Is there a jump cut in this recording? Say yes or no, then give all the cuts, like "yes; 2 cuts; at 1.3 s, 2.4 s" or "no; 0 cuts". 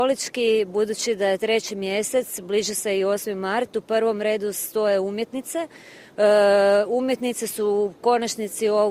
no; 0 cuts